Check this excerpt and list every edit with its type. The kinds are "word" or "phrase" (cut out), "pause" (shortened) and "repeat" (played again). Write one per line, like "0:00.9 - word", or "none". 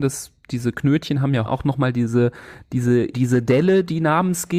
0:01.5 - phrase
0:03.1 - word

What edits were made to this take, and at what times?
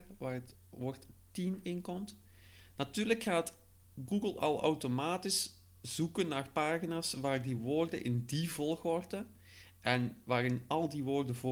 none

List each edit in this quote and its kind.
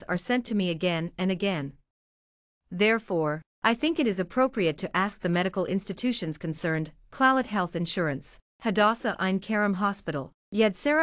none

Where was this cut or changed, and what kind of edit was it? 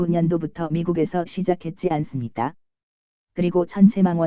0:01.2 - phrase

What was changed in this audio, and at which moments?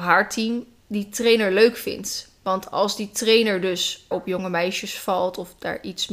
0:04.1 - word

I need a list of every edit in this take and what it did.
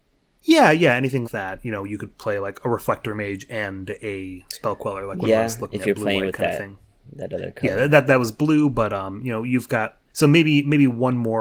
0:01.2 - word
0:10.1 - pause

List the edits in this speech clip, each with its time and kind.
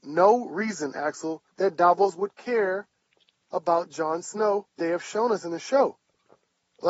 0:01.5 - pause
0:04.8 - word

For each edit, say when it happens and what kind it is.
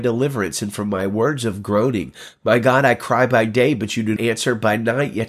0:04.2 - word

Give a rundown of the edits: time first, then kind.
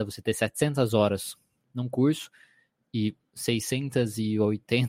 none

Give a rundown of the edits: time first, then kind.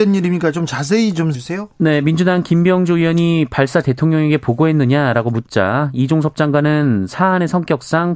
0:01.3 - word
0:03.8 - word

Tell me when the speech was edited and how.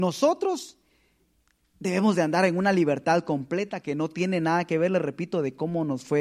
none

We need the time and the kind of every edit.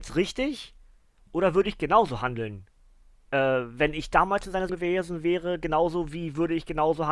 0:04.7 - word

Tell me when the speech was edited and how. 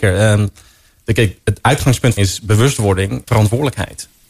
0:02.2 - phrase
0:03.3 - word

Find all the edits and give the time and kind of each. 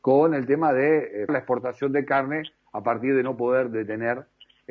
0:01.3 - word

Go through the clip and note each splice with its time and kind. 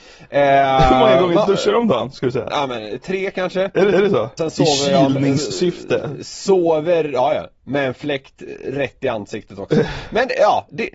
0:03.9 - repeat
0:04.4 - phrase

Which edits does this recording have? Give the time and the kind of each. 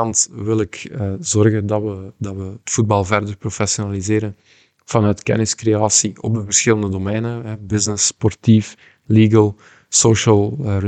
none

